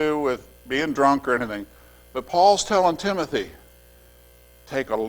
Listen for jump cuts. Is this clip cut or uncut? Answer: uncut